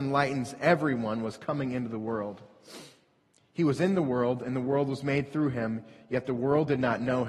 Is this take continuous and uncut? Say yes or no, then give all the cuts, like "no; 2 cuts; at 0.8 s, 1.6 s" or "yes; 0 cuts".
yes; 0 cuts